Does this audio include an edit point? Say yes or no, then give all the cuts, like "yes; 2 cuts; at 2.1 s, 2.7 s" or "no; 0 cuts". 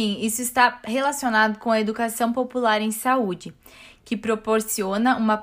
no; 0 cuts